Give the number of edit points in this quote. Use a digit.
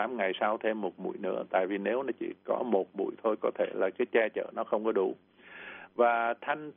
0